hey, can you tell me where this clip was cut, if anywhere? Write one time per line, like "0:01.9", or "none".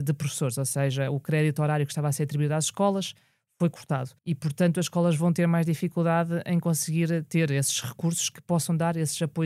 0:04.2